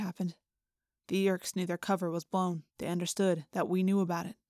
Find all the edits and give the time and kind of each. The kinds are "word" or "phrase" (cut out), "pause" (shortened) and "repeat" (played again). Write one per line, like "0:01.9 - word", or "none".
0:02.7 - pause